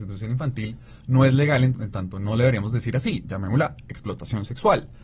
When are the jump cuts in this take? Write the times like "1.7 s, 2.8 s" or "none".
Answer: 1.7 s